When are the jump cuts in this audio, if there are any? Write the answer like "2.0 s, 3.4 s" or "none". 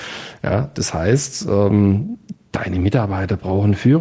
none